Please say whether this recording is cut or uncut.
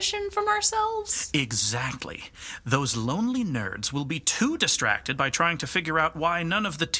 uncut